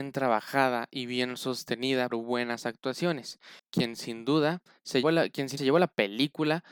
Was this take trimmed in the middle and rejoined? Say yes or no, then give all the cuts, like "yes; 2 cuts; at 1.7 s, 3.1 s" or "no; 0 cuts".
yes; 4 cuts; at 2.1 s, 3.6 s, 5.0 s, 5.6 s